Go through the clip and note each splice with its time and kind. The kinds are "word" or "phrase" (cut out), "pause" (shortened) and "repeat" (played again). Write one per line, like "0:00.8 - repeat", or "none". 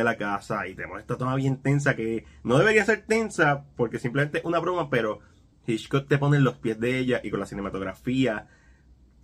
none